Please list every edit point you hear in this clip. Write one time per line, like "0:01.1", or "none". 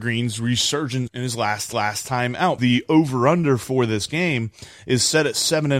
0:01.1
0:01.7
0:02.6